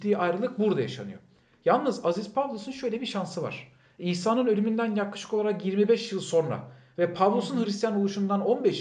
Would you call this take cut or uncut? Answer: uncut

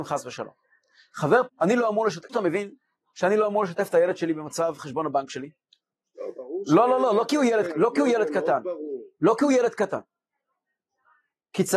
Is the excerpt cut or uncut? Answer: cut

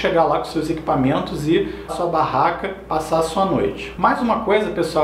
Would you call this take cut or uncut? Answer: cut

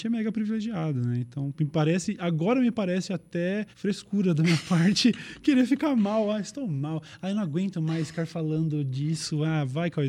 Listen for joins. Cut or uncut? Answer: cut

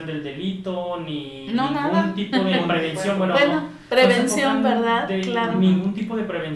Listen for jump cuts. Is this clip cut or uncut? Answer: uncut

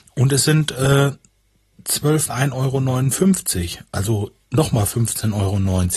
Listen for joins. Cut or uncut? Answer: cut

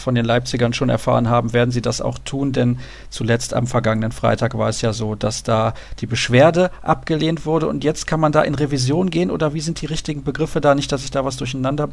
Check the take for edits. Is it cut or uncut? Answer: uncut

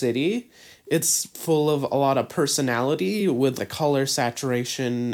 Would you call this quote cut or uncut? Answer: uncut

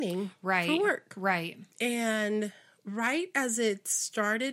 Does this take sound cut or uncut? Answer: cut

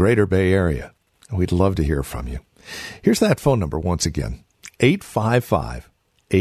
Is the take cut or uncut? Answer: uncut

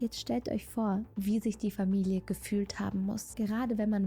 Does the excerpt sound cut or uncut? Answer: uncut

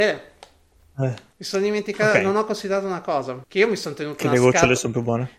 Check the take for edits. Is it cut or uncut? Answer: cut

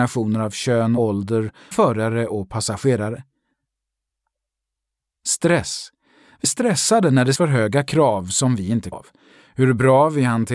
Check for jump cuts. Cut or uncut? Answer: cut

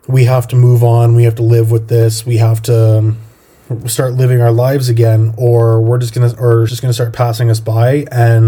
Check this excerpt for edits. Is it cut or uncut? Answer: cut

